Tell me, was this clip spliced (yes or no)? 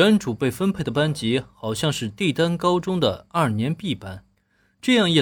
no